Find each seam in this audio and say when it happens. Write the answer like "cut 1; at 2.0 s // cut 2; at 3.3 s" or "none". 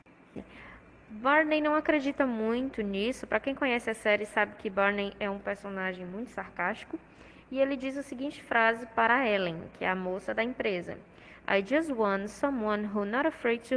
none